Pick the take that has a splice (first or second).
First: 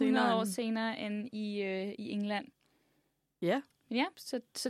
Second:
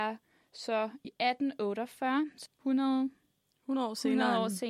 second